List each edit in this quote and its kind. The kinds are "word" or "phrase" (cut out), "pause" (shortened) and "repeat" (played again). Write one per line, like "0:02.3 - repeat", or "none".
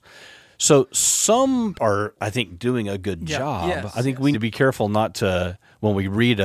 0:01.7 - word
0:04.3 - word

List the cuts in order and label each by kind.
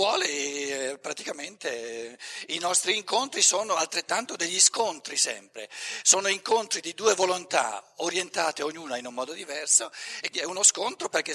0:10.3 - word

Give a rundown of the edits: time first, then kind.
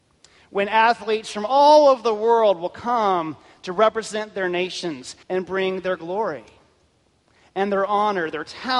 0:05.2 - pause

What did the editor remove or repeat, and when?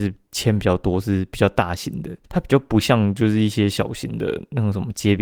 0:02.2 - pause

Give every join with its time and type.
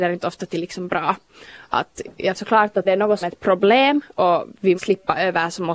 0:02.3 - word
0:02.8 - word
0:03.2 - phrase
0:04.7 - word

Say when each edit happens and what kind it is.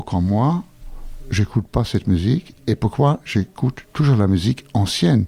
none

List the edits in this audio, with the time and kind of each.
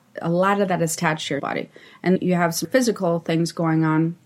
0:01.4 - word
0:02.2 - word
0:02.6 - word

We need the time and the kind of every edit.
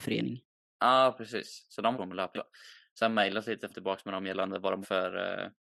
0:01.9 - word
0:02.3 - word
0:03.7 - word
0:04.8 - word

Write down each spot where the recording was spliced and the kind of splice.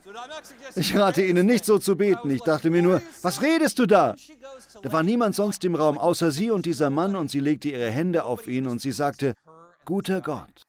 none

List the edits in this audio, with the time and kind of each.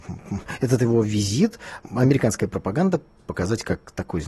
0:01.8 - pause
0:03.2 - word

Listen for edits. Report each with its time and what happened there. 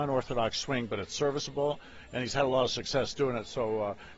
none

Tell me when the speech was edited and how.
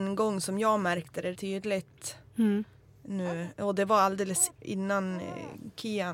0:01.3 - word
0:04.5 - word

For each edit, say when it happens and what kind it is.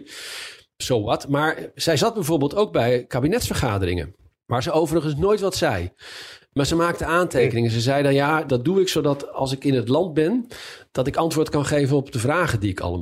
none

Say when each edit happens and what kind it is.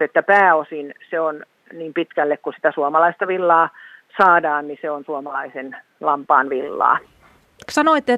none

